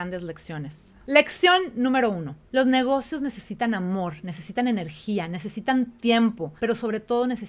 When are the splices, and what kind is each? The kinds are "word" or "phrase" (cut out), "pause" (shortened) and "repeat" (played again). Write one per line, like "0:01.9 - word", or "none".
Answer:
0:02.4 - pause
0:06.6 - pause